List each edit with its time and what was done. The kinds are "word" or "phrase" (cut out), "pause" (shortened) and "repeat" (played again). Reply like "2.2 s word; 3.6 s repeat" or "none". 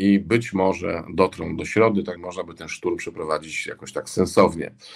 1.6 s word; 2.2 s word